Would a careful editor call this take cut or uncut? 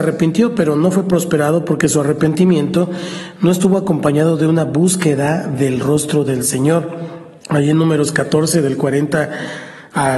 cut